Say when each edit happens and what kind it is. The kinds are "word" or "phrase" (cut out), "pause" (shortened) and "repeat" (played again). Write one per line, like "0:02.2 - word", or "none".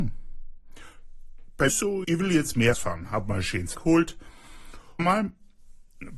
0:01.7 - word
0:02.0 - word
0:02.7 - word
0:03.7 - word
0:05.0 - phrase